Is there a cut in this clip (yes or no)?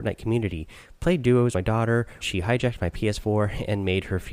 yes